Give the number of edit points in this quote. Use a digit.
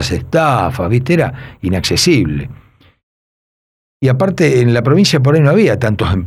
0